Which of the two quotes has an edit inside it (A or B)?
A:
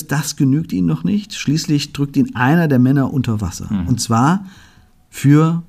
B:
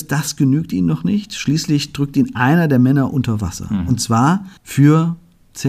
B